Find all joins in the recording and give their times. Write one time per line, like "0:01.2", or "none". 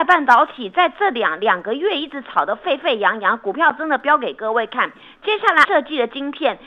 0:05.6